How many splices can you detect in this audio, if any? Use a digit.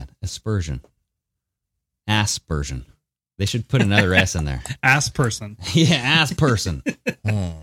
0